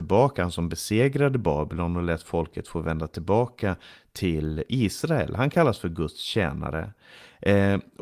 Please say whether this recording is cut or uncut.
uncut